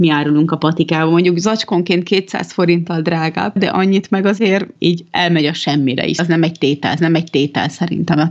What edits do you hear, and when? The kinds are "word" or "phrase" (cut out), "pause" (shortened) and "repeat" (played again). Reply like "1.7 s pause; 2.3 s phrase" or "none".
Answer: 4.8 s pause; 6.2 s word; 7.0 s repeat